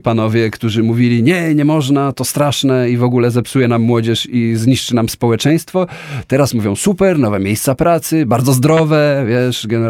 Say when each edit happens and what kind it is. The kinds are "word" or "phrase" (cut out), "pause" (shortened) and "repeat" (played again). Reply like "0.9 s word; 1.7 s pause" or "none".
none